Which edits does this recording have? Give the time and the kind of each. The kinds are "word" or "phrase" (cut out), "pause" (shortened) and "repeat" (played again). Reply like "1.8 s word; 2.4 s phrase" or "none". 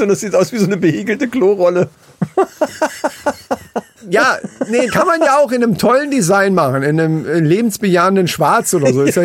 4.0 s pause; 4.9 s word

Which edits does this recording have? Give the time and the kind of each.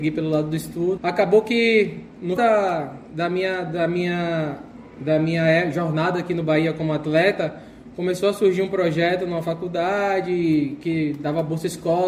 1.0 s word; 2.4 s word

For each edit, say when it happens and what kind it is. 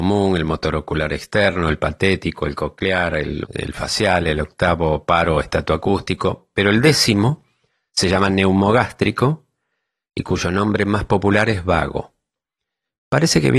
3.5 s word

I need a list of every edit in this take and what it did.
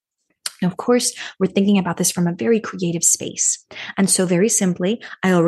none

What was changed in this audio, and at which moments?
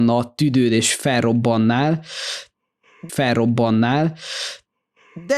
3.1 s repeat

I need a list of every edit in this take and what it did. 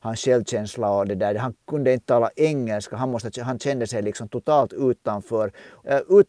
none

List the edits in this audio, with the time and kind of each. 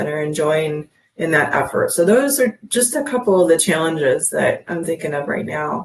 none

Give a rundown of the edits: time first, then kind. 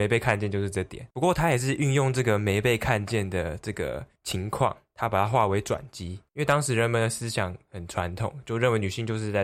1.1 s pause; 6.3 s pause

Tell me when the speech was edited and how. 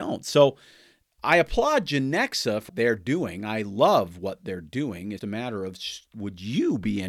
2.7 s word; 5.2 s word

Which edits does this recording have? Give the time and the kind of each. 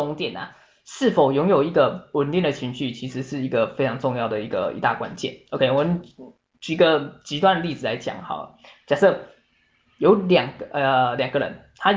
none

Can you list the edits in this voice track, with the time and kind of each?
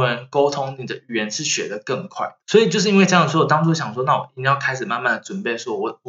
2.4 s pause

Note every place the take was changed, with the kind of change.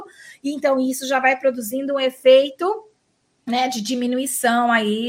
none

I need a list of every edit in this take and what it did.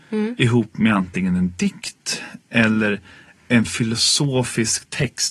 none

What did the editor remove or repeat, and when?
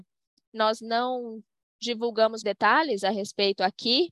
2.4 s word

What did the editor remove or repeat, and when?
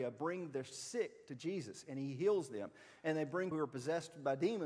3.5 s word

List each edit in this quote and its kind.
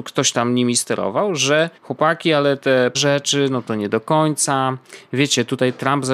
1.8 s pause; 2.9 s word

